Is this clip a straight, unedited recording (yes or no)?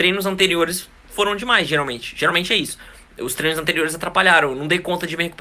yes